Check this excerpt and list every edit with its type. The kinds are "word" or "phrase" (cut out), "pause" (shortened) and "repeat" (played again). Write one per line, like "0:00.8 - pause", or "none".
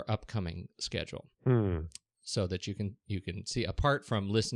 0:01.3 - pause